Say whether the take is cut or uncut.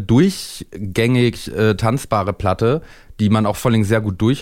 uncut